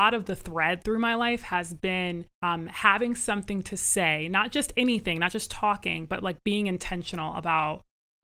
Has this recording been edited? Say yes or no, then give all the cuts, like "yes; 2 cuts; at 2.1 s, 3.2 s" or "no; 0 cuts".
yes; 1 cut; at 2.3 s